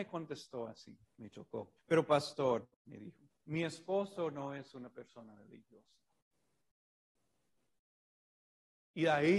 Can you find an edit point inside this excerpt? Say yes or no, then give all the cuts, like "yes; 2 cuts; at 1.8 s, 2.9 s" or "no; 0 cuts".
yes; 4 cuts; at 1.1 s, 1.8 s, 2.7 s, 3.3 s